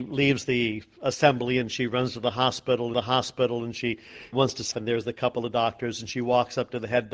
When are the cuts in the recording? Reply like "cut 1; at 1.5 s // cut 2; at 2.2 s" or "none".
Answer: cut 1; at 2.9 s // cut 2; at 4.3 s // cut 3; at 4.7 s